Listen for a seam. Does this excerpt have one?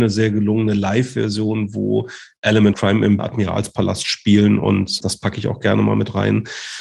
yes; 3 cuts; at 2.7 s, 3.2 s, 5.0 s

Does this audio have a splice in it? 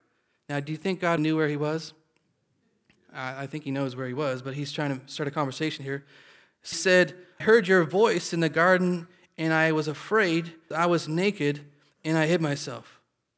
yes; 4 cuts; at 1.2 s, 6.7 s, 7.4 s, 10.7 s

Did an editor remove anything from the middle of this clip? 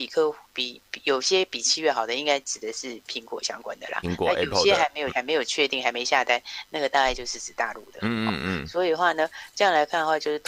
yes; 2 cuts; at 4.0 s, 5.1 s

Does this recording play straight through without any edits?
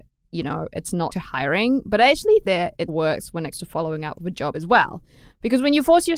no; 5 cuts; at 1.1 s, 2.4 s, 2.9 s, 3.5 s, 4.5 s

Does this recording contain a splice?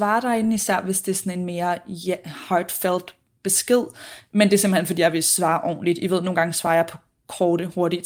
no; 0 cuts

